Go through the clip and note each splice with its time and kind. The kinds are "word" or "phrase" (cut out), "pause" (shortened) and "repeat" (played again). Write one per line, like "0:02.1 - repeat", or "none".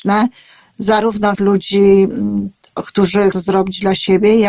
0:01.3 - word
0:03.3 - word